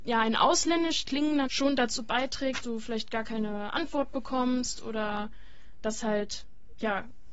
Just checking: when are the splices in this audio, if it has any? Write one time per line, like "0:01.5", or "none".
0:01.4
0:02.6
0:05.8